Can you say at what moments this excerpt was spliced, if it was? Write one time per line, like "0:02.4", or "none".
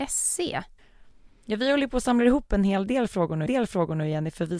0:03.5